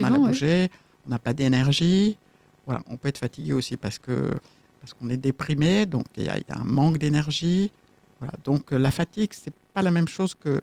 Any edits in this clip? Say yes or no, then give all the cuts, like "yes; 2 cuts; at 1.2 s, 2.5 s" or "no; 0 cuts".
no; 0 cuts